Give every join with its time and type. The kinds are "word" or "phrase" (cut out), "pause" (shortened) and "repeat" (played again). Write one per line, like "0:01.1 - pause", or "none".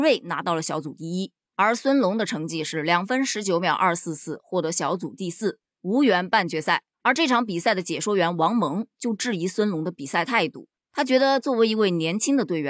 0:06.9 - pause